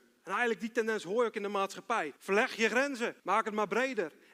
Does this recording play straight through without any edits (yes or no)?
no